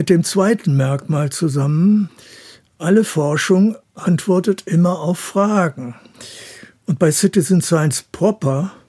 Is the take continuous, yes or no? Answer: yes